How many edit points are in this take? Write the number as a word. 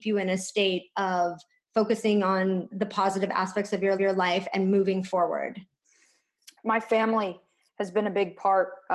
three